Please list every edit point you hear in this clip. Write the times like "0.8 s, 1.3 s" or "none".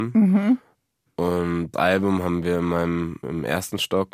1.7 s, 3.2 s